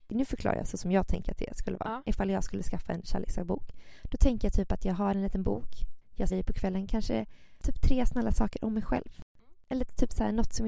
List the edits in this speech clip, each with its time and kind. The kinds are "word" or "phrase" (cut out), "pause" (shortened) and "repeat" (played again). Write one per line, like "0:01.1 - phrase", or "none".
0:06.3 - word